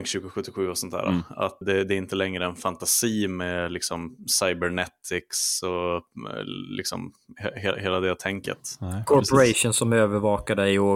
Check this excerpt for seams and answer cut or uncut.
cut